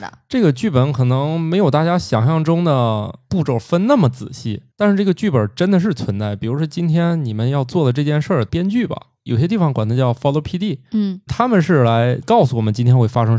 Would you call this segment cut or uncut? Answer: cut